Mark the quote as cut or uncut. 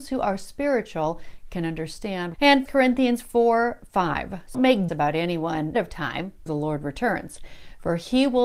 cut